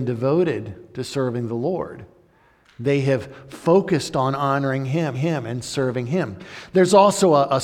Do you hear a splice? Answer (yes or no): yes